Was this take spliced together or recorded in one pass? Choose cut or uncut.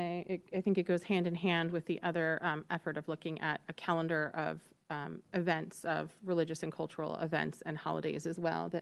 uncut